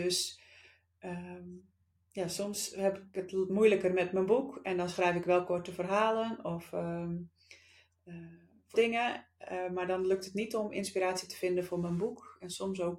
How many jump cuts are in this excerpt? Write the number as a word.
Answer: one